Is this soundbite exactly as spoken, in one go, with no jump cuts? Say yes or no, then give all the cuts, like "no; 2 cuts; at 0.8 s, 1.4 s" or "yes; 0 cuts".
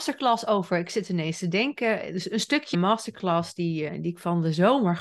no; 2 cuts; at 2.7 s, 3.9 s